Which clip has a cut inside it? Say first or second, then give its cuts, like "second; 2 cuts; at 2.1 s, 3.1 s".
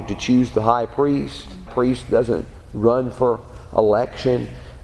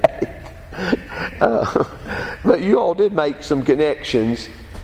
first; 1 cut; at 1.7 s